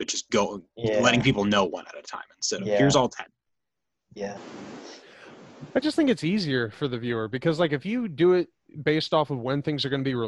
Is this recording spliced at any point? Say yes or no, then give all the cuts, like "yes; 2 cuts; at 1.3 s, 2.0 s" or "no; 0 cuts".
no; 0 cuts